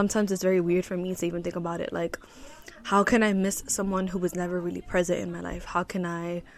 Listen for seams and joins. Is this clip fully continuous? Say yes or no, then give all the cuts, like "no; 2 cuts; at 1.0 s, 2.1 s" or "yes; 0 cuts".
yes; 0 cuts